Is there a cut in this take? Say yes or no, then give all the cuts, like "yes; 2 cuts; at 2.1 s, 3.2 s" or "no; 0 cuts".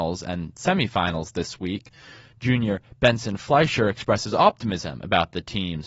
no; 0 cuts